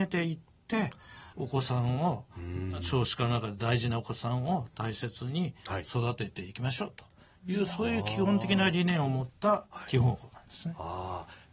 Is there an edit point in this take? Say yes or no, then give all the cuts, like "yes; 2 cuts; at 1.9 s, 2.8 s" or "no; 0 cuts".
yes; 1 cut; at 1.3 s